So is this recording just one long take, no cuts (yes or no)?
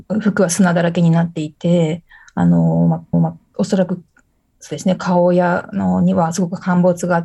no